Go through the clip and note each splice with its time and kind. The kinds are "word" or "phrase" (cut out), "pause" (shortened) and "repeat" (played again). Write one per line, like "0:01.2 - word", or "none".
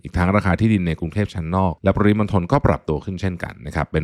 0:01.8 - pause

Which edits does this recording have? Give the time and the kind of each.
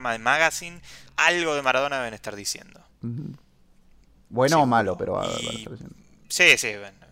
0:01.1 - pause

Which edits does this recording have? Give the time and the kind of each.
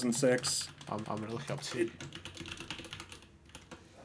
0:01.0 - repeat

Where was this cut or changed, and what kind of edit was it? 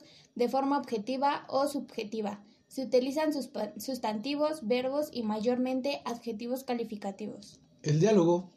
none

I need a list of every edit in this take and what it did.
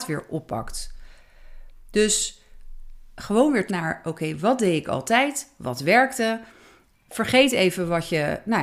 0:03.7 - word

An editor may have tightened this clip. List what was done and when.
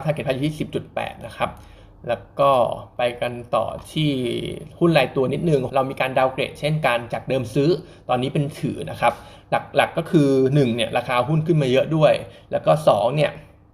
0:05.7 - phrase

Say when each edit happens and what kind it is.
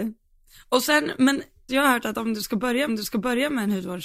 0:01.7 - word
0:02.9 - repeat

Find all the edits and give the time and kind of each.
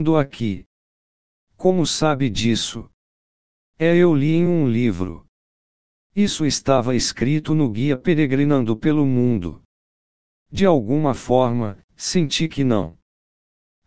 none

